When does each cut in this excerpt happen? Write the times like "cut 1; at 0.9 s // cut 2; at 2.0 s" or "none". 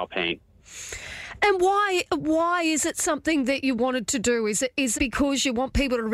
cut 1; at 4.9 s